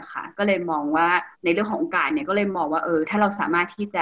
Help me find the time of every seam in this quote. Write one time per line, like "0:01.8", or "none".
0:01.3